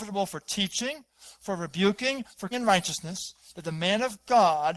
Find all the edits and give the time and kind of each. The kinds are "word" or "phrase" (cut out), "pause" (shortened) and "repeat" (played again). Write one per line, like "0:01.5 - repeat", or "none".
0:02.5 - phrase

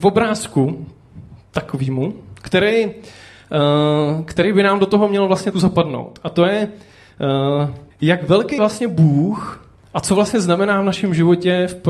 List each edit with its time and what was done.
0:05.5 - word
0:07.9 - pause
0:08.6 - word

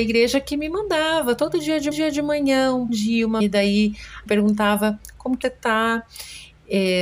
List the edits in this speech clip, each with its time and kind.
0:01.9 - repeat
0:02.9 - word
0:03.4 - word
0:04.3 - phrase
0:05.4 - word

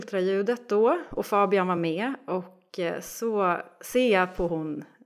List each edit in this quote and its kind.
none

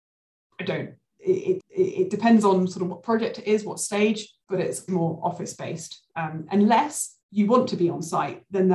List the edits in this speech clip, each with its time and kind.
0:01.6 - repeat
0:04.4 - pause
0:04.9 - word
0:07.2 - pause

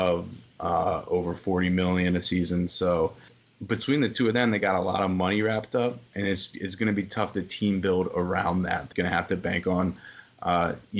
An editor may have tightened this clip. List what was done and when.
0:03.3 - pause
0:06.1 - pause
0:08.9 - word

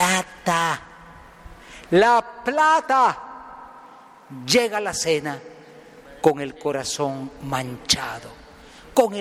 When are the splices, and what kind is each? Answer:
none

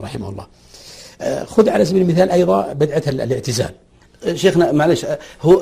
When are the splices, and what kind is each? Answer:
none

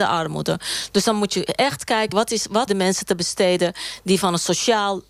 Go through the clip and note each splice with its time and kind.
0:02.1 - word
0:02.7 - word

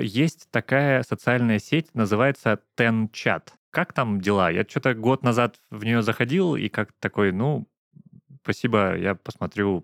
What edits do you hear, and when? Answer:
none

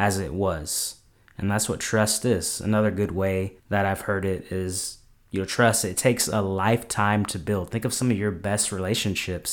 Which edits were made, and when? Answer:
0:03.6 - pause

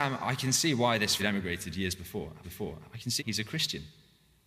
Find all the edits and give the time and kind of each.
0:01.2 - phrase
0:02.4 - repeat
0:03.2 - word

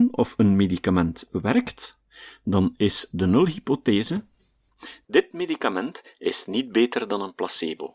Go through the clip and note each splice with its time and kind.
none

